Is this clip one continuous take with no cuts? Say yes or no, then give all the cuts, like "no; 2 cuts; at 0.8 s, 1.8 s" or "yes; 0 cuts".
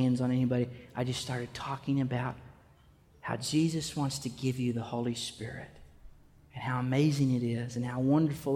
yes; 0 cuts